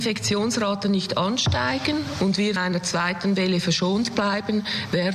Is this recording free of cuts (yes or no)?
no